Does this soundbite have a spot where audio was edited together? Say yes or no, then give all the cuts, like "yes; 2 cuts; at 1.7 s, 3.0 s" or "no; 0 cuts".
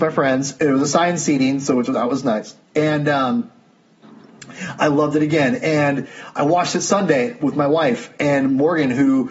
yes; 1 cut; at 2.6 s